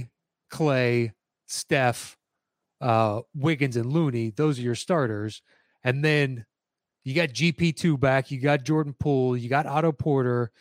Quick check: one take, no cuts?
yes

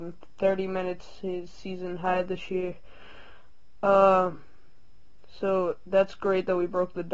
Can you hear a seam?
no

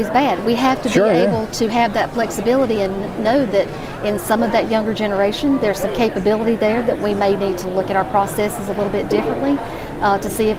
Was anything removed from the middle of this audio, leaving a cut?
no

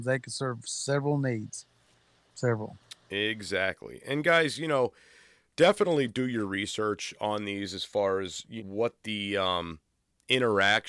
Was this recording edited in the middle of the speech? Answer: yes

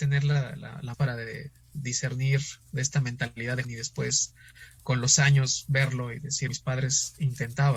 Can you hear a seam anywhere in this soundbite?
yes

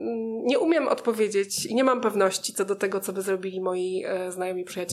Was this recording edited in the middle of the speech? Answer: no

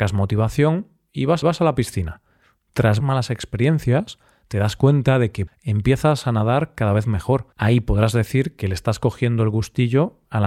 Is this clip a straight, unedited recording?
no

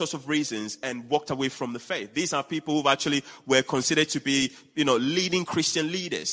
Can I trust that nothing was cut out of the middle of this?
yes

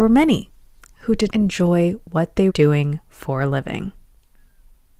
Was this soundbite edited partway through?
yes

